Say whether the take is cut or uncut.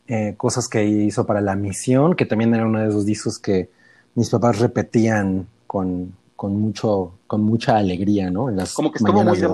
uncut